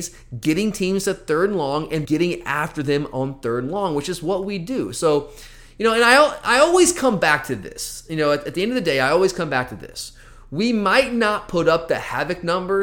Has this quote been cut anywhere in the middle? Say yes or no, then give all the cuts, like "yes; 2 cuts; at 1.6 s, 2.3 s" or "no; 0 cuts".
yes; 1 cut; at 2.0 s